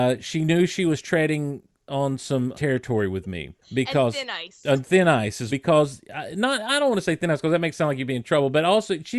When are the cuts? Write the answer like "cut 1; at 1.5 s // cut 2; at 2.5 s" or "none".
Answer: cut 1; at 2.5 s // cut 2; at 3.6 s // cut 3; at 5.5 s